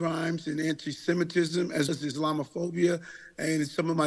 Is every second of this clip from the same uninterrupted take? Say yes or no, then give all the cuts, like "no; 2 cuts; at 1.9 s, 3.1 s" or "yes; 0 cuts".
no; 1 cut; at 1.9 s